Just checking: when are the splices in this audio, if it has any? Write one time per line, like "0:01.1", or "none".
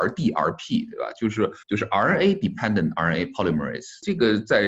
0:01.6